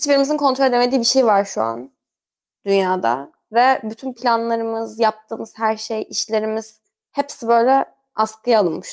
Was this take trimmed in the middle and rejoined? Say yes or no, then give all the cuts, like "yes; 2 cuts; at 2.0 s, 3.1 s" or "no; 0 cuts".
no; 0 cuts